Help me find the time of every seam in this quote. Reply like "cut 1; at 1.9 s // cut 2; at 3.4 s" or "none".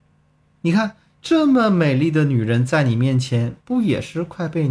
cut 1; at 3.6 s